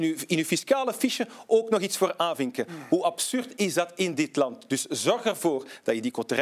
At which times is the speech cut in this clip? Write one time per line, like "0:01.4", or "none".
none